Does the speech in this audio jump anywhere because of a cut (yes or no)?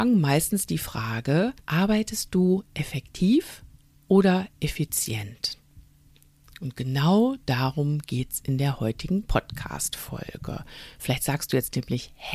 yes